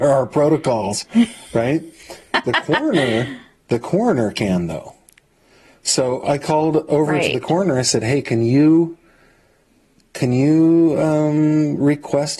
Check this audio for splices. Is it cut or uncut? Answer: uncut